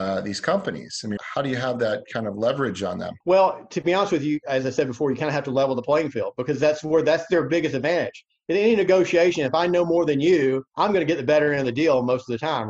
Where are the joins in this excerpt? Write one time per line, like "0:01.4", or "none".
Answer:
0:01.2
0:03.2
0:10.7